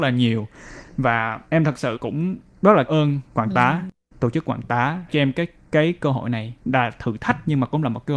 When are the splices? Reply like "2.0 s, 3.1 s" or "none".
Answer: 1.5 s, 1.9 s, 2.9 s, 3.3 s, 5.1 s, 6.6 s